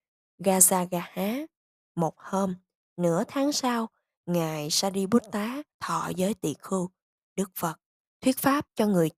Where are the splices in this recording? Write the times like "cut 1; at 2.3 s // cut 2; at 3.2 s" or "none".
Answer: cut 1; at 5.7 s